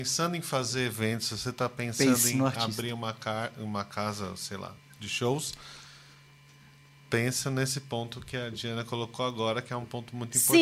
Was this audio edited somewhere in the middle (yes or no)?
no